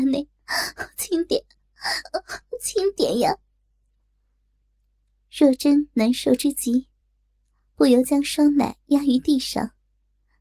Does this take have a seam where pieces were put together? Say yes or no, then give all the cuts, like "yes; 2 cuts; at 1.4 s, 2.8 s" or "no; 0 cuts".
no; 0 cuts